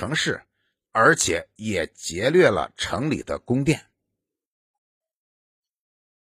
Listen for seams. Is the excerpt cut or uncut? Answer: uncut